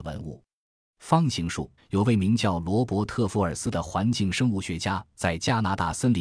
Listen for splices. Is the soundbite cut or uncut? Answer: cut